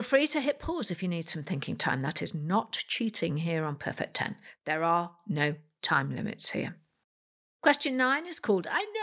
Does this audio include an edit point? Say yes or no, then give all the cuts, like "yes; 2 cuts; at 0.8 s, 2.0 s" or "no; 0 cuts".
no; 0 cuts